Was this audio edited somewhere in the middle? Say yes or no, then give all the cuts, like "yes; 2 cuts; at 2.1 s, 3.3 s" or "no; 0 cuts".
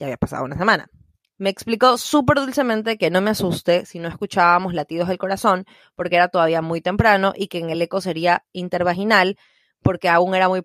no; 0 cuts